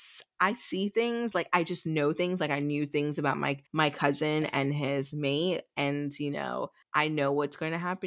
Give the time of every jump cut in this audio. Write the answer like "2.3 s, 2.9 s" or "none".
3.7 s, 6.8 s

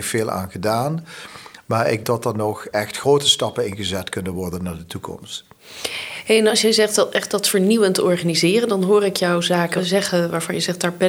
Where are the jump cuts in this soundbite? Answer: 2.0 s

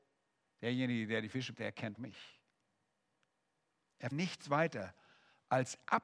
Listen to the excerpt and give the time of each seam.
1.5 s, 1.9 s, 4.1 s

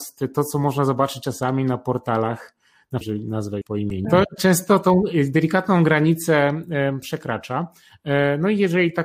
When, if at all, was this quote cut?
3.0 s, 3.6 s, 4.0 s, 4.4 s

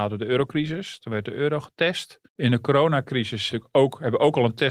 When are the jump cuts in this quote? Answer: 2.3 s, 3.5 s

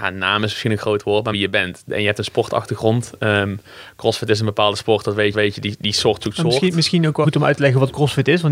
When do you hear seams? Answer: 1.3 s, 5.3 s, 7.2 s

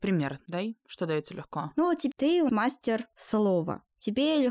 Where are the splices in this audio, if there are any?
2.1 s, 2.5 s

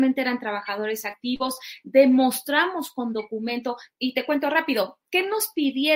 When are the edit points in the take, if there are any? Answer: 3.9 s

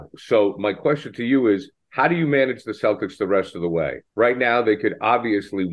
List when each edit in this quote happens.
4.1 s

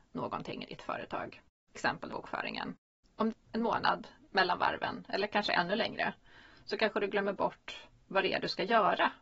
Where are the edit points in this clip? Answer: 1.7 s, 2.1 s, 3.3 s

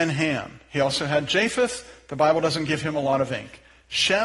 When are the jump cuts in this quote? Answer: none

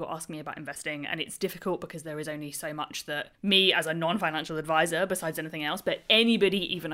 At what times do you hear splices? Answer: 3.3 s

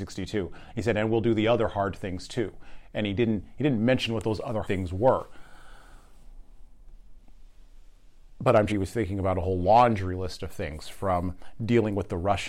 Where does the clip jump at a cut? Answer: 4.6 s, 8.7 s

